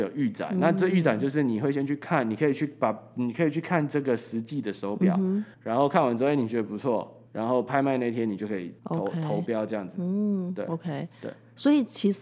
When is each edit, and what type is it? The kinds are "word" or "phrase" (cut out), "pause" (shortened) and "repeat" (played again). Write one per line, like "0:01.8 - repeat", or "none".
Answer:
0:05.5 - pause
0:07.3 - pause
0:08.8 - pause